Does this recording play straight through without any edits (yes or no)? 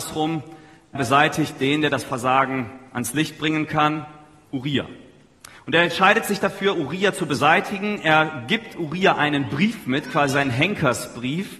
no